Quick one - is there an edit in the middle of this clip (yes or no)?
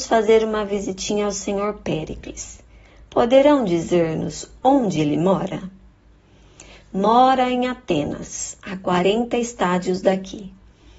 no